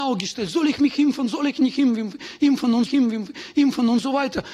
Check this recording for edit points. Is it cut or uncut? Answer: cut